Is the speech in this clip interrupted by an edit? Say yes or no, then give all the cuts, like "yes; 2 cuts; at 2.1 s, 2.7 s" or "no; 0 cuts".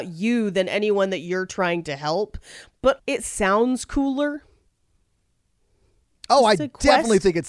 yes; 1 cut; at 3.0 s